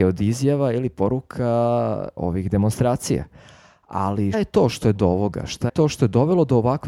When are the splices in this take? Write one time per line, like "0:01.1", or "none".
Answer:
0:02.2
0:04.3
0:05.0
0:05.7

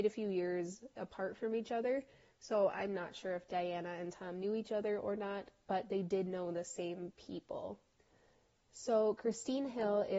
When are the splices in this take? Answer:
0:00.9

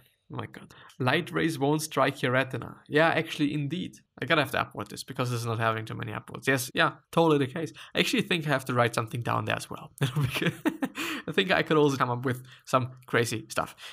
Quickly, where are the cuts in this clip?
0:06.7
0:12.0

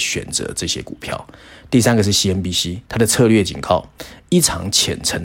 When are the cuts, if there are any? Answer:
0:02.9

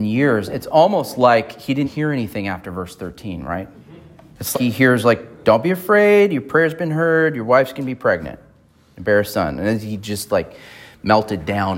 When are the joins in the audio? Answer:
0:01.8
0:04.5

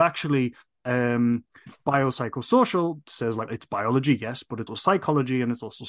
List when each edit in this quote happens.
0:03.5
0:04.7

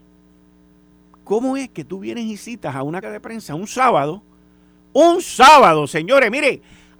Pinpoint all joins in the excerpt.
0:03.0

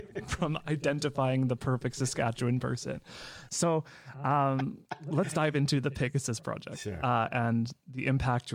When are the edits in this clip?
none

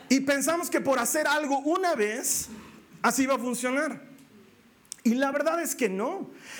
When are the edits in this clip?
none

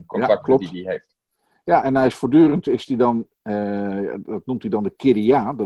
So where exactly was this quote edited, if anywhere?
0:01.8

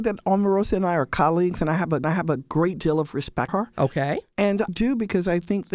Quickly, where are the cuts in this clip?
0:02.0
0:03.5
0:04.7

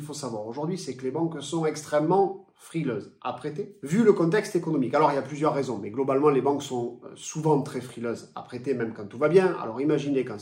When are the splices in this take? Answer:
none

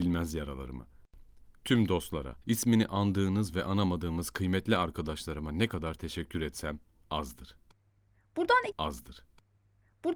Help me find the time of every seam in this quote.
0:02.4
0:08.7

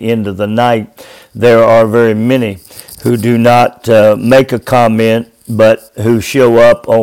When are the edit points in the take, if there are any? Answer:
none

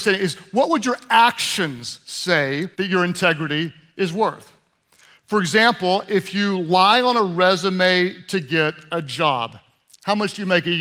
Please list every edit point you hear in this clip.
0:02.7

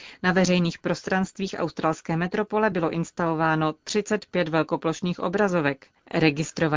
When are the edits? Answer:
none

